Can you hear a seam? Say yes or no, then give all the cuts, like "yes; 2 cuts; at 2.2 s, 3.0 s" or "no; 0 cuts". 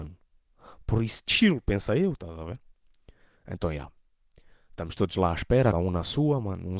yes; 1 cut; at 5.7 s